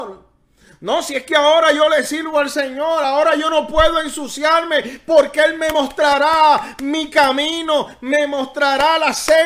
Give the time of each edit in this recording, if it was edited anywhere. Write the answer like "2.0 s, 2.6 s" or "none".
none

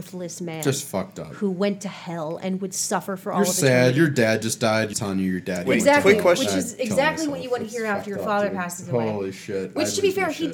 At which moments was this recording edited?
4.9 s

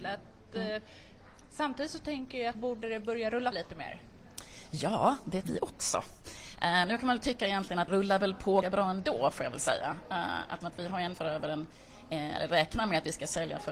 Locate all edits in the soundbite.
2.5 s, 3.5 s, 5.4 s, 7.9 s, 8.6 s, 10.6 s, 11.1 s

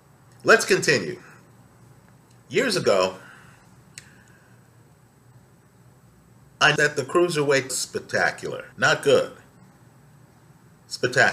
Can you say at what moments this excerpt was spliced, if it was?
6.8 s, 7.7 s, 8.7 s

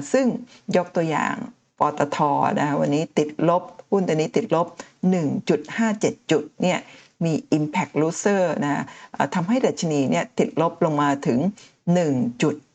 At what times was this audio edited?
none

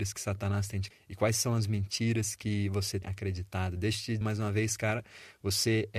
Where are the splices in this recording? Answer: 0.9 s, 3.0 s, 4.2 s

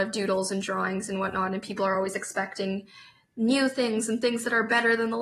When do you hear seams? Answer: none

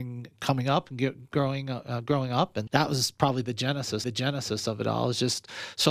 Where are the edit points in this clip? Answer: 2.7 s, 4.0 s

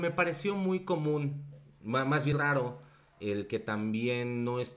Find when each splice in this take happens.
2.3 s

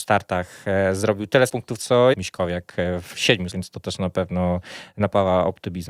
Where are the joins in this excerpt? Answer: 1.5 s, 2.1 s, 3.5 s

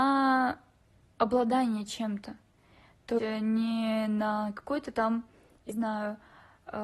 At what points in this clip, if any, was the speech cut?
3.2 s, 5.7 s

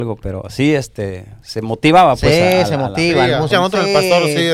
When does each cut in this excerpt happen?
3.5 s

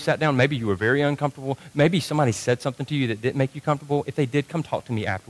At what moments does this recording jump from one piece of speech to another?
none

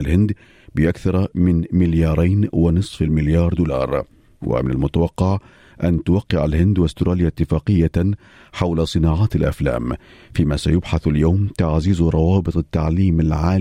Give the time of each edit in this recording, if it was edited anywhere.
none

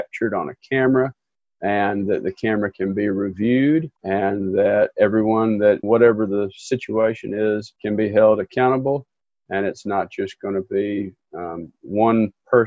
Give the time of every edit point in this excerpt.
4.0 s, 5.8 s, 7.8 s

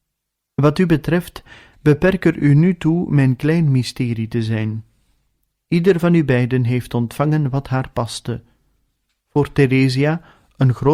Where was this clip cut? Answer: none

